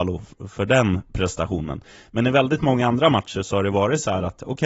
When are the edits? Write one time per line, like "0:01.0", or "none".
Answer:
none